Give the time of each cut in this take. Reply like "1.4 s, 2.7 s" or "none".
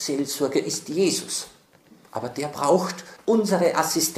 none